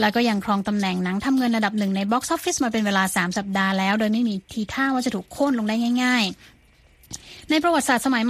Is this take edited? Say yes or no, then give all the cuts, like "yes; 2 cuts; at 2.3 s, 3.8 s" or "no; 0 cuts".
no; 0 cuts